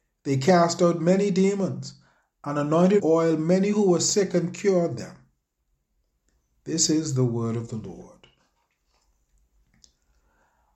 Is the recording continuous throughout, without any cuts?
no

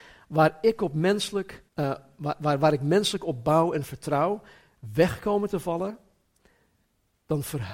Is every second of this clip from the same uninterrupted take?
no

